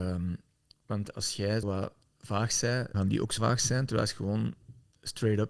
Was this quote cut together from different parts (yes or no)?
yes